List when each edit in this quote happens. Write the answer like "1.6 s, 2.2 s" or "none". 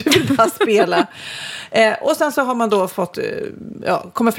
none